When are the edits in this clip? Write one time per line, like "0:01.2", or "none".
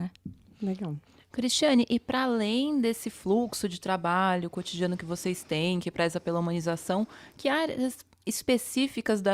none